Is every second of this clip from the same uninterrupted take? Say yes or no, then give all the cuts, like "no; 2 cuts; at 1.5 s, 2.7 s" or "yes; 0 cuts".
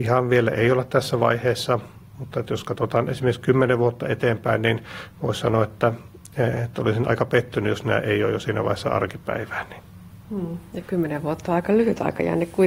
yes; 0 cuts